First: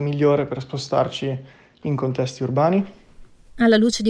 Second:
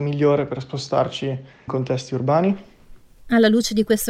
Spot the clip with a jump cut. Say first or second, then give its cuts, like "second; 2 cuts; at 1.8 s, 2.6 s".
second; 1 cut; at 1.7 s